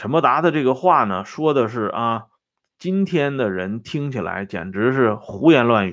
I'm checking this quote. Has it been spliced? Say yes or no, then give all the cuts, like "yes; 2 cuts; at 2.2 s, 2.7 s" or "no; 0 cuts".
no; 0 cuts